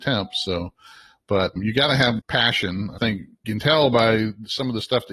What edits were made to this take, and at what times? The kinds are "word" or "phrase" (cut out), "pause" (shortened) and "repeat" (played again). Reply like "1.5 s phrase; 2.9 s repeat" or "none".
1.6 s word; 2.2 s word; 3.0 s word; 3.4 s word